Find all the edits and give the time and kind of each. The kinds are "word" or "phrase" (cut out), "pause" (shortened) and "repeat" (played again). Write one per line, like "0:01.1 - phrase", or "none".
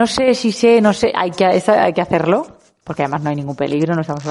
none